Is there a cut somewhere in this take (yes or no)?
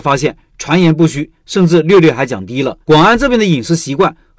yes